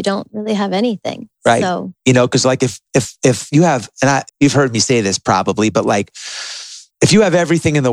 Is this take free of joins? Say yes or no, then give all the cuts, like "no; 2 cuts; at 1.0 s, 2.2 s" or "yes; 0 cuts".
no; 3 cuts; at 2.0 s, 4.3 s, 6.9 s